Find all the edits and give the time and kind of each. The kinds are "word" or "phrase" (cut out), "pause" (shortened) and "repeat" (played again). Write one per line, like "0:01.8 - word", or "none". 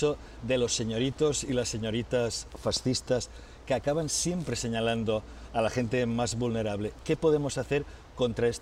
none